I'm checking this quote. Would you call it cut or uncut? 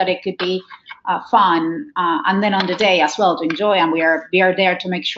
uncut